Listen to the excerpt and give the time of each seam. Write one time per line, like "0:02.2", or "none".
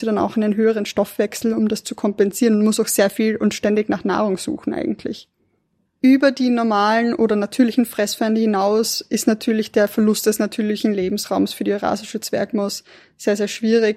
none